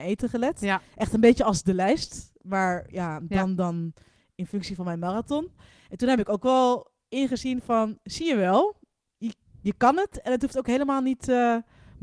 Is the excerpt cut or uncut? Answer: uncut